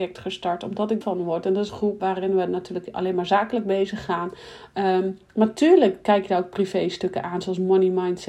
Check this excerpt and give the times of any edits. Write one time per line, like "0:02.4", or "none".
0:01.0
0:01.7
0:02.0